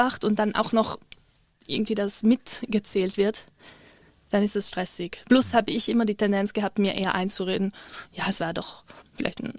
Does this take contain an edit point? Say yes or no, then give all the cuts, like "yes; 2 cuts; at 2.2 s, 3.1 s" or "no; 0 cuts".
no; 0 cuts